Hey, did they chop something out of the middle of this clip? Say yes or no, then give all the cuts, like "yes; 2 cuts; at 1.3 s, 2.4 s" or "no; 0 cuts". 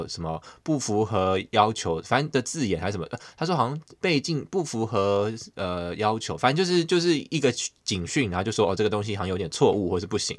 yes; 1 cut; at 4.0 s